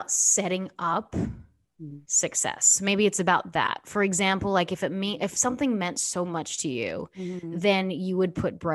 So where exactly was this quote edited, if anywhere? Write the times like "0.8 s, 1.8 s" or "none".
2.0 s